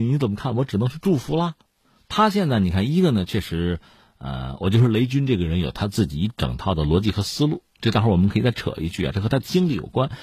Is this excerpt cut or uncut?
uncut